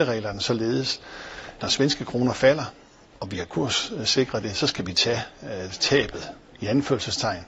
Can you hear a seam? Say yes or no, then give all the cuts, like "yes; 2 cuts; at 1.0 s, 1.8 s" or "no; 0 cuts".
yes; 1 cut; at 1.6 s